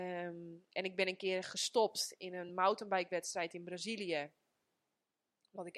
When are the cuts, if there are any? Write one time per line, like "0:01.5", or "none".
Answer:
none